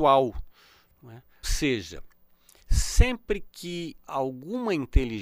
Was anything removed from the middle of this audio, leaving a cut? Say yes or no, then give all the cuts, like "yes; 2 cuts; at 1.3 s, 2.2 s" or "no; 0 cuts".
yes; 2 cuts; at 1.4 s, 4.0 s